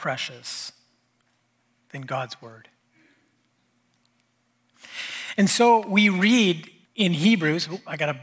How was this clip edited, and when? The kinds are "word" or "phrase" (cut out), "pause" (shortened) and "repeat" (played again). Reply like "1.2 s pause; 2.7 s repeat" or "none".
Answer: 6.8 s pause